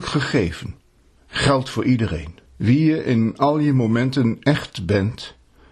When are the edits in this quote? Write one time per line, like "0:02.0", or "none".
0:02.5